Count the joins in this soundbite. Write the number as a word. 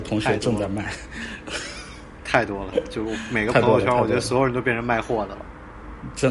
one